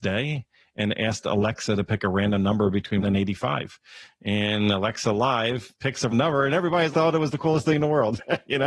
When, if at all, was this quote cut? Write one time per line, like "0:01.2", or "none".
0:03.0
0:06.1
0:06.9

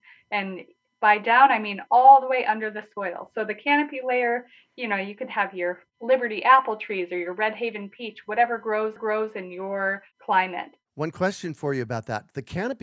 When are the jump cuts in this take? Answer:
0:09.0

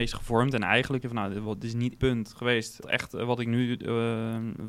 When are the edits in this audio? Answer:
0:01.0
0:02.0
0:02.8

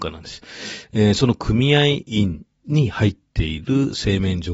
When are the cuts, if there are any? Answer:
0:02.5

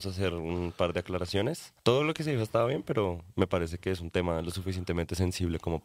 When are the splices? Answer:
0:01.8

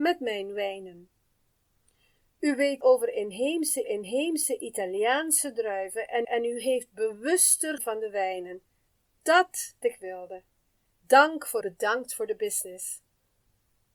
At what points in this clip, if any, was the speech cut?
0:02.8
0:03.8
0:06.2
0:07.8
0:09.8
0:11.6

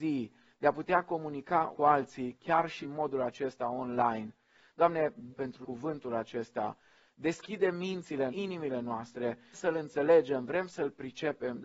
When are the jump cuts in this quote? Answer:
0:01.7
0:02.8
0:05.3
0:05.6
0:08.3
0:09.5

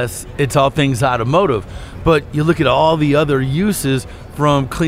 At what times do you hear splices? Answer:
none

